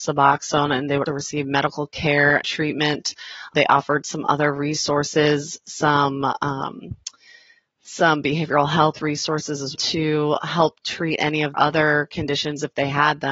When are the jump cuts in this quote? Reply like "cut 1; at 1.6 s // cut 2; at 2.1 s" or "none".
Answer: cut 1; at 1.1 s // cut 2; at 2.4 s // cut 3; at 9.7 s // cut 4; at 11.5 s